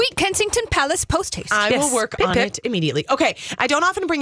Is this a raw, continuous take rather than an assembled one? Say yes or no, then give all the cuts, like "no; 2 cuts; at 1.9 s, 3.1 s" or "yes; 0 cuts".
yes; 0 cuts